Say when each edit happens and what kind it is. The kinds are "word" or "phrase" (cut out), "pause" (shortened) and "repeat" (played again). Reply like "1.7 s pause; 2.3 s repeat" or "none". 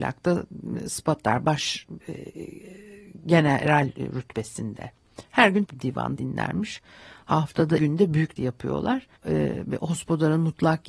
2.0 s pause; 5.6 s word; 6.2 s word; 7.8 s word; 8.4 s word; 9.2 s pause